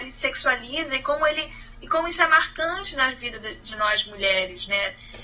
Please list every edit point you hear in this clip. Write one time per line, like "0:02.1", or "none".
none